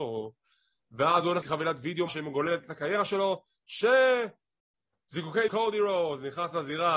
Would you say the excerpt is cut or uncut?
cut